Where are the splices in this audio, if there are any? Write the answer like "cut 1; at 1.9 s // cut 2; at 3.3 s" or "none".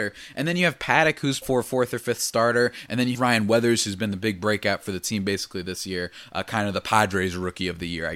cut 1; at 1.4 s // cut 2; at 3.1 s